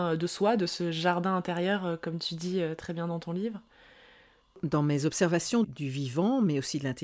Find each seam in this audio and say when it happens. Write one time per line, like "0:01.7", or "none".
0:05.6